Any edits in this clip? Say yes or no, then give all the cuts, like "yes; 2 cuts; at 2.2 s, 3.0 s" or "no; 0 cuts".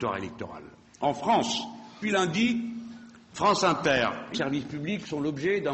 yes; 2 cuts; at 2.0 s, 4.3 s